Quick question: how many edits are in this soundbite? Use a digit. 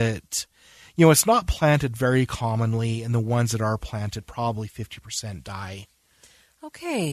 0